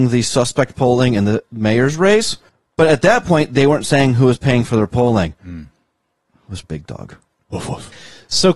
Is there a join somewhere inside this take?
yes; 1 cut; at 6.6 s

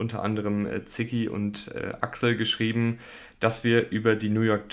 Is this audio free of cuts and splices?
yes; 0 cuts

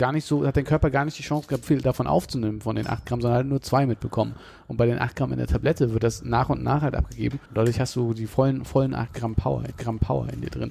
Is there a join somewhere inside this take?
yes; 3 cuts; at 1.6 s, 7.5 s, 9.7 s

